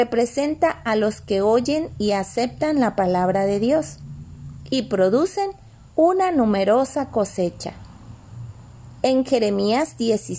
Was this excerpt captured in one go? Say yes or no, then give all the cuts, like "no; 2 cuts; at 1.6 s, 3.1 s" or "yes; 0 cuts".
yes; 0 cuts